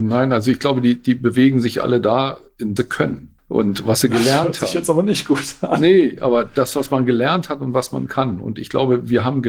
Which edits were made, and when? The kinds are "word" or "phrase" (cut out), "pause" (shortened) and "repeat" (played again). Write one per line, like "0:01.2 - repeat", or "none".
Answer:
0:02.8 - phrase
0:03.4 - pause